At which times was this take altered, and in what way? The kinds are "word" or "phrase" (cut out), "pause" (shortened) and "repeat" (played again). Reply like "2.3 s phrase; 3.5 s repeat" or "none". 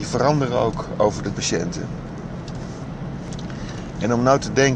1.3 s phrase